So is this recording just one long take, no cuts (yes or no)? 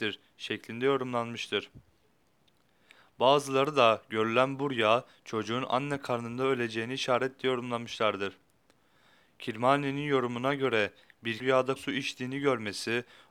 no